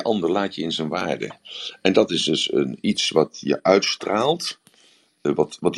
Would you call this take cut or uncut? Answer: uncut